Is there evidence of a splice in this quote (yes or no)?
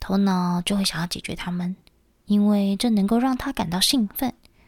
no